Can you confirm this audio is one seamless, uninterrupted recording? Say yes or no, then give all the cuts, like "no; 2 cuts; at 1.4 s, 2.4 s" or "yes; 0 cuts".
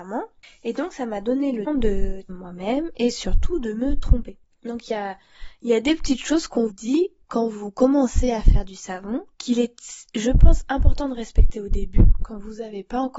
no; 4 cuts; at 1.7 s, 2.3 s, 6.7 s, 9.3 s